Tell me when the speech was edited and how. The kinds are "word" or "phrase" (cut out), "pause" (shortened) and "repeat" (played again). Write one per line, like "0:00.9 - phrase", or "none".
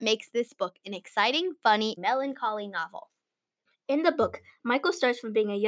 0:02.0 - word